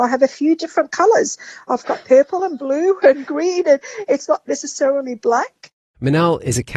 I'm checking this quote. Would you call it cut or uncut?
uncut